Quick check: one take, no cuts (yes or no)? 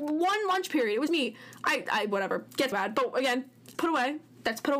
no